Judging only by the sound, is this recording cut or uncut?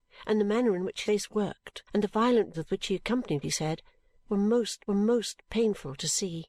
cut